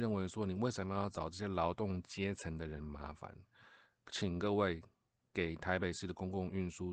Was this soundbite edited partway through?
no; 0 cuts

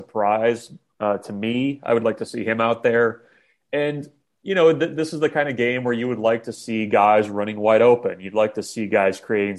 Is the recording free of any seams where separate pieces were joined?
yes; 0 cuts

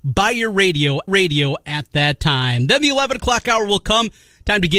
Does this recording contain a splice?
yes; 1 cut; at 1.1 s

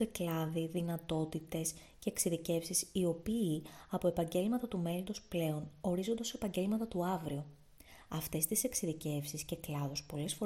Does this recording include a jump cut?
no; 0 cuts

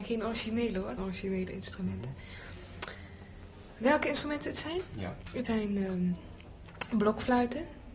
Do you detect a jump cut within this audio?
yes; 2 cuts; at 1.0 s, 5.4 s

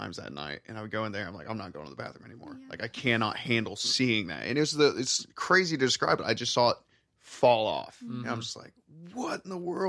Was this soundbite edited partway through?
no; 0 cuts

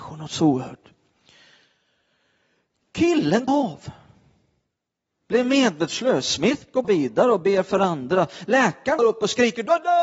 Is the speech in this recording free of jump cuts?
no; 3 cuts; at 3.5 s, 6.8 s, 9.0 s

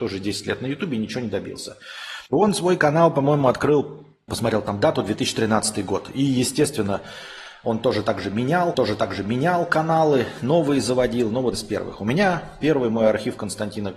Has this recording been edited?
yes; 4 cuts; at 2.3 s, 4.3 s, 8.7 s, 11.5 s

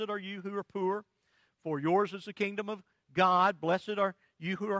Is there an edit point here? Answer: no; 0 cuts

